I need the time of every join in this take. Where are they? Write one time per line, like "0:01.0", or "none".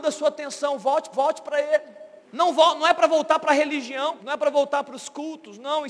0:01.1
0:02.2
0:04.2